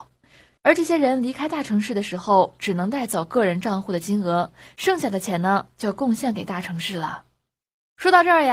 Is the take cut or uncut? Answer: uncut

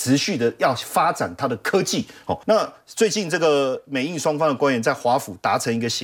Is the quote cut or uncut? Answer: cut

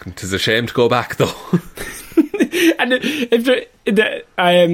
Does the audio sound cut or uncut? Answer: uncut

